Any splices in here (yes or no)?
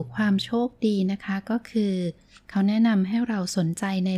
no